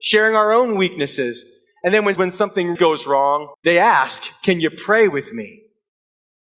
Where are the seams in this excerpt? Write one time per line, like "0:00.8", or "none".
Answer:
0:02.2
0:02.8
0:03.5